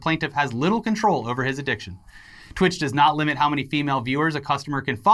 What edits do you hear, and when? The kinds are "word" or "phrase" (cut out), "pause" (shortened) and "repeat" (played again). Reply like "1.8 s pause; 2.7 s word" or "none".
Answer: none